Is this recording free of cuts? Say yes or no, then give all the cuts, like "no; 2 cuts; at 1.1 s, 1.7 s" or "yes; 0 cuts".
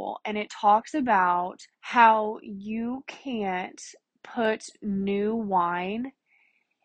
no; 1 cut; at 1.7 s